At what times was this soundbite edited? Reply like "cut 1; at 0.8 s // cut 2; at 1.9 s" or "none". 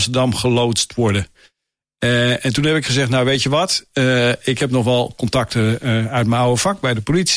none